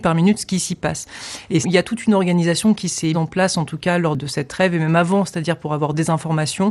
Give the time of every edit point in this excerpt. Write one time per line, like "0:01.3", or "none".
0:01.6
0:03.1